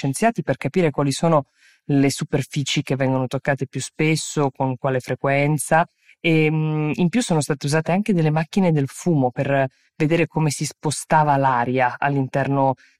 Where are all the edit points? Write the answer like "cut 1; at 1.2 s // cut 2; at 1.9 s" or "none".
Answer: none

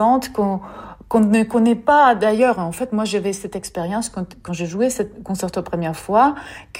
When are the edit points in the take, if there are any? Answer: none

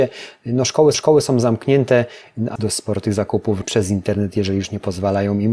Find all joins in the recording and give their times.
cut 1; at 0.9 s // cut 2; at 2.6 s // cut 3; at 3.6 s

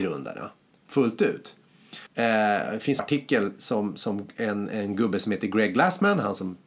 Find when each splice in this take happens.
cut 1; at 2.1 s // cut 2; at 3.0 s

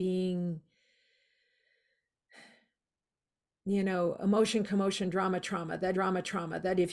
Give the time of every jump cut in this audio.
cut 1; at 5.9 s

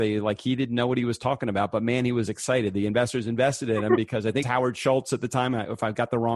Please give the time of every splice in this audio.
cut 1; at 4.4 s

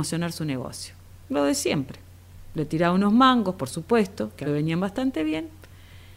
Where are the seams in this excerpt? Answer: cut 1; at 1.2 s // cut 2; at 4.4 s

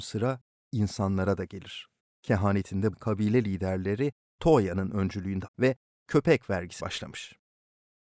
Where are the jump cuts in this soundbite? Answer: cut 1; at 2.9 s // cut 2; at 4.3 s // cut 3; at 5.5 s // cut 4; at 6.8 s

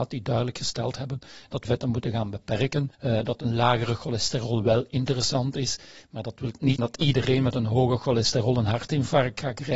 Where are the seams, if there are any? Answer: cut 1; at 1.6 s // cut 2; at 2.9 s // cut 3; at 6.8 s

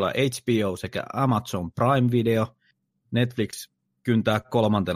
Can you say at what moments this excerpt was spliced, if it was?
none

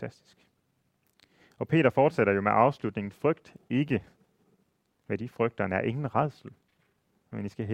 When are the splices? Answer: none

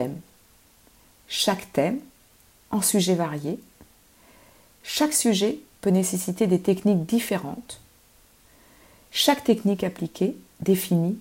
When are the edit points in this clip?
none

